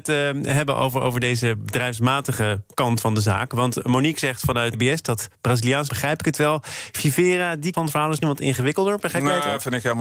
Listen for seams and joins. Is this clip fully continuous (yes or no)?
no